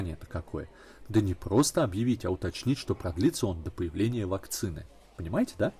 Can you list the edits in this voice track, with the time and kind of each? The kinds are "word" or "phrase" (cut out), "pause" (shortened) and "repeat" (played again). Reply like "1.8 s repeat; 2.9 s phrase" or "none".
none